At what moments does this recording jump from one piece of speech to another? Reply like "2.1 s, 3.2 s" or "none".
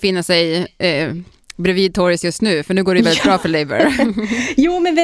none

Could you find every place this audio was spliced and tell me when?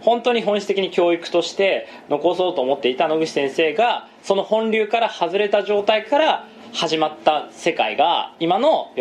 none

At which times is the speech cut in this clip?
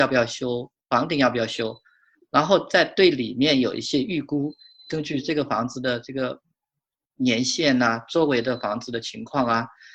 none

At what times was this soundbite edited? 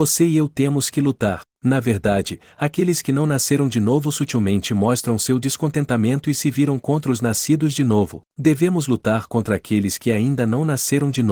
1.5 s, 8.3 s

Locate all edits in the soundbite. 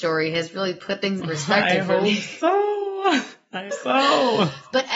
1.2 s, 3.7 s

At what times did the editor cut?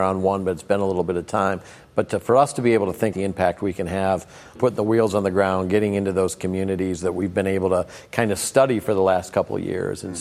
3.1 s, 4.6 s

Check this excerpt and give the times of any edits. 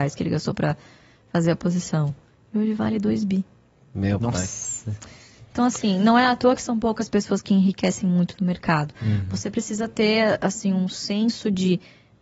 none

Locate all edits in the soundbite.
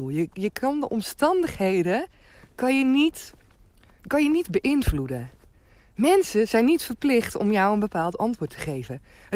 4.0 s

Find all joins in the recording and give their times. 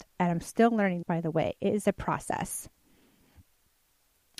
1.0 s

